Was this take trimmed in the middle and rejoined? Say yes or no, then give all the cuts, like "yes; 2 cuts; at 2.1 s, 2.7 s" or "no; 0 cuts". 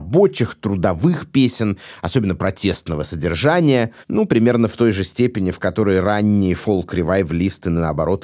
yes; 1 cut; at 4.0 s